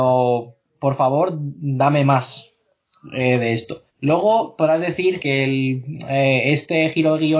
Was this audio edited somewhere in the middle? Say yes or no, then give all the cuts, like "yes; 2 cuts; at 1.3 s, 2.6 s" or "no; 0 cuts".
yes; 2 cuts; at 3.9 s, 5.2 s